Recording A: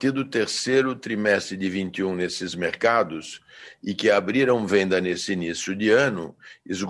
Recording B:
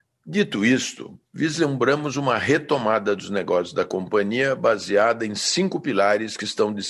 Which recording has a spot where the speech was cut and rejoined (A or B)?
B